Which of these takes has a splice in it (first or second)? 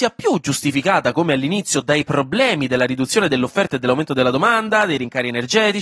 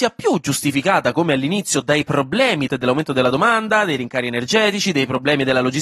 second